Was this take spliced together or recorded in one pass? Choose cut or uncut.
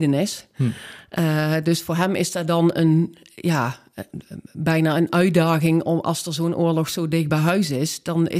uncut